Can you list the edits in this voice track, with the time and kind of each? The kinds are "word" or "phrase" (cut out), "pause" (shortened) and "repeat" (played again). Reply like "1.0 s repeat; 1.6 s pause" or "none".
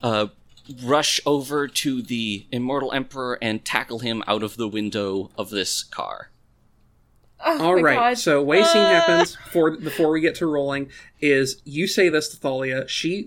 none